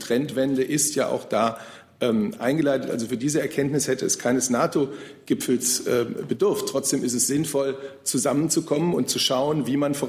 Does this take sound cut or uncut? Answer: uncut